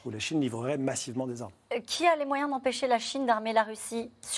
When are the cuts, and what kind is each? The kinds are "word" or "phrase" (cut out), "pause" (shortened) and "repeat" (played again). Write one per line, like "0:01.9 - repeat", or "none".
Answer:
none